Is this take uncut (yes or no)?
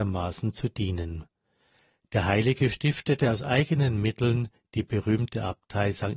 yes